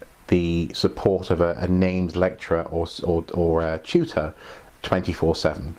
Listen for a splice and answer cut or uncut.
uncut